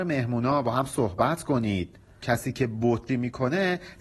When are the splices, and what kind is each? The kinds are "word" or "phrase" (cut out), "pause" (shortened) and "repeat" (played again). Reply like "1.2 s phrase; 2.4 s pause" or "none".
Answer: 2.2 s word; 3.1 s word

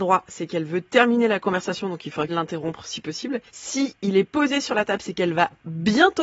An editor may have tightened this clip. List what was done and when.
2.3 s phrase; 3.5 s pause

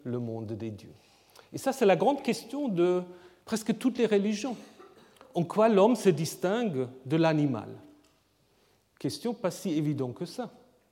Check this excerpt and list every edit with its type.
none

